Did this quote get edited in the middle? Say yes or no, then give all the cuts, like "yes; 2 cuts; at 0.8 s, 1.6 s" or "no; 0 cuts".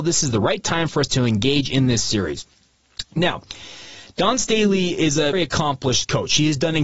yes; 1 cut; at 5.3 s